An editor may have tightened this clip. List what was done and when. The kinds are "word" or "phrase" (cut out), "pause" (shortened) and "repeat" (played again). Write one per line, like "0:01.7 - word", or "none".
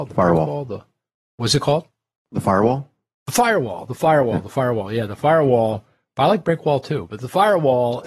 none